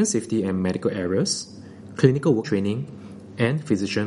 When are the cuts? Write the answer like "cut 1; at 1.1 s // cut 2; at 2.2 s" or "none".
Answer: cut 1; at 2.4 s